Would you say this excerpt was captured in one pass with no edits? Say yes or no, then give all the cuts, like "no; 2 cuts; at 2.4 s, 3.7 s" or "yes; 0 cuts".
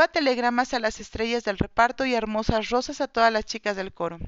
yes; 0 cuts